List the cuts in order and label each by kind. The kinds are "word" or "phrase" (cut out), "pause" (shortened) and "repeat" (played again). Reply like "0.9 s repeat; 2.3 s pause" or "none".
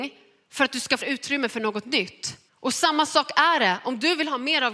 1.0 s word; 2.5 s pause